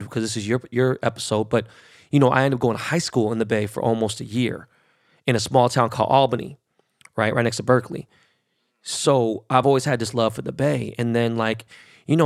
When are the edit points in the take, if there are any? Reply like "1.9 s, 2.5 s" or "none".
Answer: none